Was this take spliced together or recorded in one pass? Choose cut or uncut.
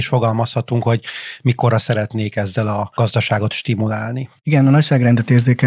uncut